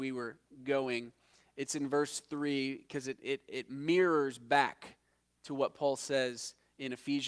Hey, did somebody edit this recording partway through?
no; 0 cuts

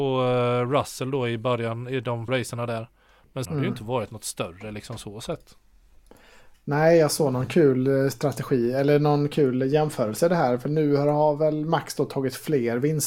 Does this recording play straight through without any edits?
no; 2 cuts; at 2.3 s, 3.4 s

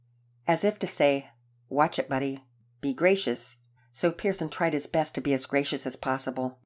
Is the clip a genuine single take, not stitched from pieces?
yes; 0 cuts

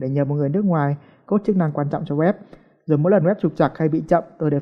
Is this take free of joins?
yes; 0 cuts

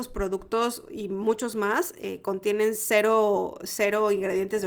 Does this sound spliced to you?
no; 0 cuts

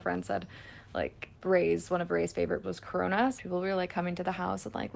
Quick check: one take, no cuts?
no; 3 cuts; at 1.3 s, 2.6 s, 3.4 s

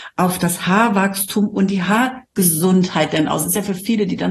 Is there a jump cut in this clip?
no; 0 cuts

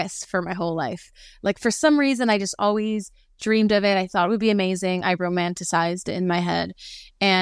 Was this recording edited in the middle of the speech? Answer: no; 0 cuts

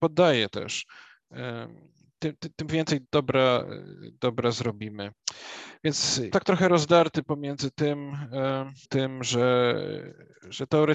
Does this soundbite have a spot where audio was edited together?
yes; 3 cuts; at 3.0 s, 6.3 s, 8.8 s

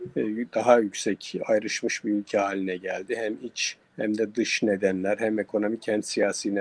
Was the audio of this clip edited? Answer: yes; 1 cut; at 3.9 s

